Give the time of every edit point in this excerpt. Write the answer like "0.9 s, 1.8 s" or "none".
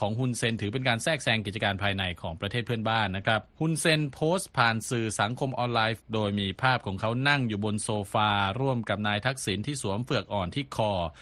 3.5 s, 6.0 s